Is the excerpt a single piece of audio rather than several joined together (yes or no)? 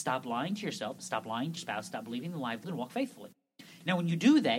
no